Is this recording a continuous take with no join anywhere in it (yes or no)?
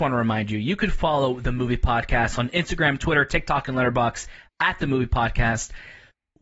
yes